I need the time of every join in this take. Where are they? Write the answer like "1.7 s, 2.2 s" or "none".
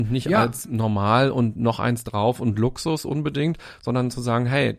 none